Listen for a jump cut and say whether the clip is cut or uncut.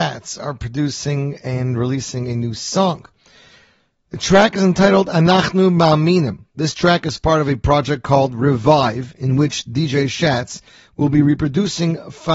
uncut